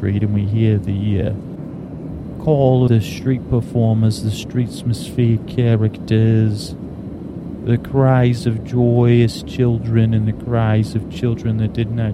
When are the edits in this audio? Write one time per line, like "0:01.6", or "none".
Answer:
0:02.9

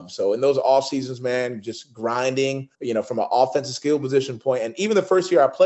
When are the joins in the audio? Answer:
0:02.7

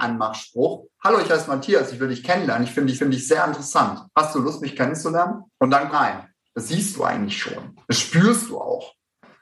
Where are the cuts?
0:03.0
0:04.1
0:05.5
0:05.9

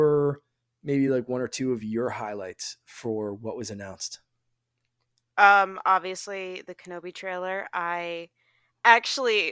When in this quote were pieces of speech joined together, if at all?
none

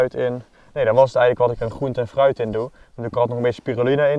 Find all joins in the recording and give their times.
none

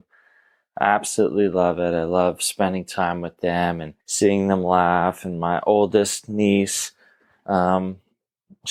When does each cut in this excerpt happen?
0:04.0

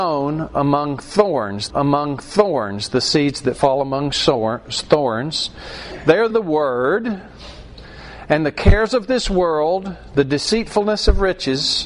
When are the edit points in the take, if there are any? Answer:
0:01.7
0:06.3

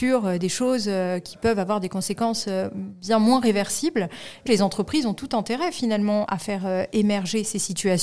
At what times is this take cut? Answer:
0:04.5
0:06.3

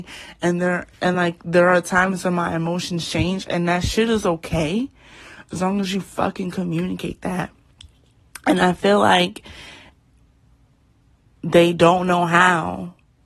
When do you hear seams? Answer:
none

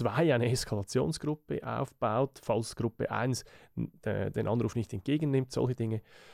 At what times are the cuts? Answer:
none

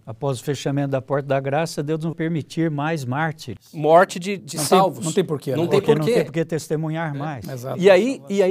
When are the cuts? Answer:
0:02.1
0:04.4

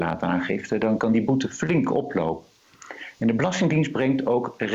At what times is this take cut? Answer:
0:01.0

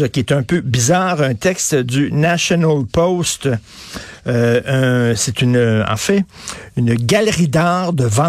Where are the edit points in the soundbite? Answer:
none

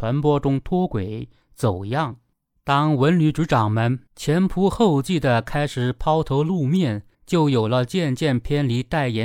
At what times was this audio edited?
0:02.3
0:04.1
0:07.1

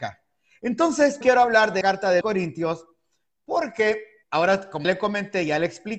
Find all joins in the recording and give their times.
0:01.2
0:01.8
0:02.2
0:04.2
0:04.8

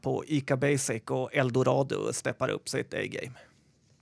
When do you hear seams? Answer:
none

